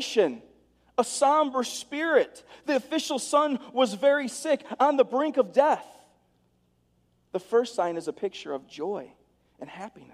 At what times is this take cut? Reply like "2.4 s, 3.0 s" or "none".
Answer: none